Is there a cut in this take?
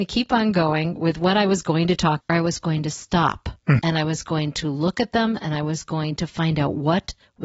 yes; 2 cuts; at 2.2 s, 3.8 s

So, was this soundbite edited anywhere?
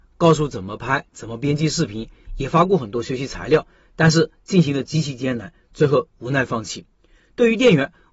no; 0 cuts

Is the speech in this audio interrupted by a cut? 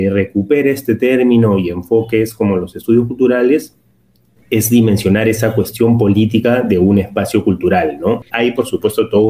no; 0 cuts

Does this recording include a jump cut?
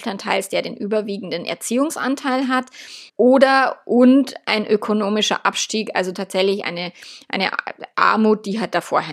yes; 1 cut; at 3.1 s

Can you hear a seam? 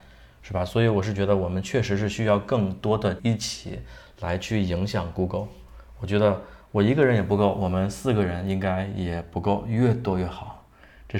yes; 1 cut; at 3.2 s

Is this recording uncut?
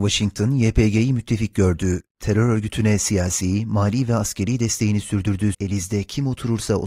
no; 1 cut; at 5.5 s

